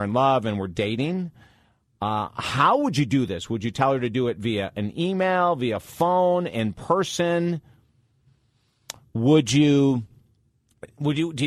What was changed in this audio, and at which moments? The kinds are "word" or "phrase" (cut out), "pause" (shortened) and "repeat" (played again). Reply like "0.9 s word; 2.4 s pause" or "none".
none

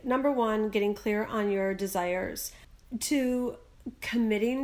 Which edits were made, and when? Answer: none

